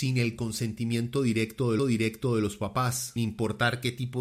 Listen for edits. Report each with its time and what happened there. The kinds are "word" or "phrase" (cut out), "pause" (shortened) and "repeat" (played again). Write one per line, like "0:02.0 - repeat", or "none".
0:01.8 - repeat
0:03.2 - word